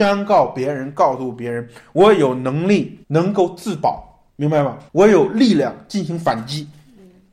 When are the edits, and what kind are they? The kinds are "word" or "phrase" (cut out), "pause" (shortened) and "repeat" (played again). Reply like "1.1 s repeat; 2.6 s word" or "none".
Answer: 3.0 s pause; 4.3 s pause; 4.9 s pause